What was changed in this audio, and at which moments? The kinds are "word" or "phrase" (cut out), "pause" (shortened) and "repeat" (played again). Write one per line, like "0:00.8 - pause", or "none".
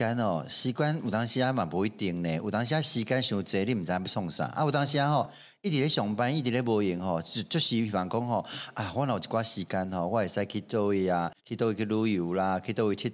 0:11.4 - pause

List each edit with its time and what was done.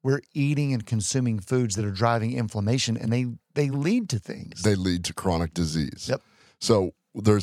none

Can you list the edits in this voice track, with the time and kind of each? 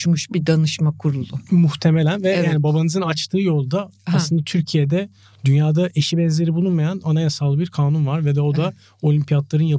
none

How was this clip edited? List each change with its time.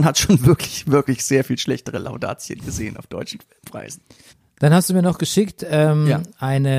0:04.3 - pause

